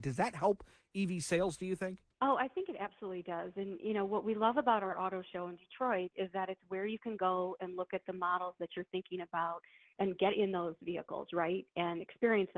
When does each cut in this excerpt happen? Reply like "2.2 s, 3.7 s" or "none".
2.1 s